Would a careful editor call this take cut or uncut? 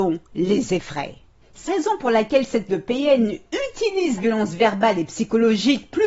cut